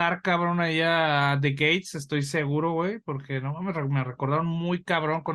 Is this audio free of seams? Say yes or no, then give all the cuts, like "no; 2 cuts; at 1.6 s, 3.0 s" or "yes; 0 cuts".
yes; 0 cuts